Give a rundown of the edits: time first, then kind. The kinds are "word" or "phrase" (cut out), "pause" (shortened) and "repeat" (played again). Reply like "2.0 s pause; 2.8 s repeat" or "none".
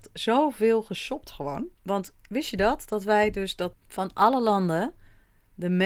1.7 s pause; 3.7 s phrase